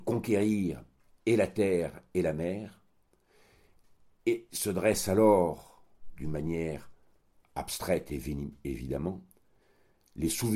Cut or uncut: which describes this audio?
uncut